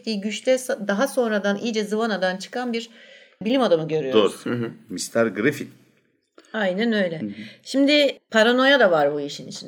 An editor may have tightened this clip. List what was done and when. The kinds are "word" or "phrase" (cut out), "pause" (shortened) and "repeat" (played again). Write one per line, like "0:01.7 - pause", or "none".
none